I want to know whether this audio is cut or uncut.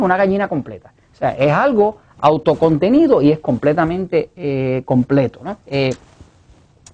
cut